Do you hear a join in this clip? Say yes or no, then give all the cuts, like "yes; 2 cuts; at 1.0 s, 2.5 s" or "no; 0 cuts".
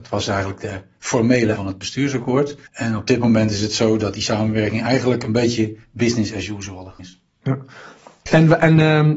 yes; 3 cuts; at 1.5 s, 2.7 s, 7.0 s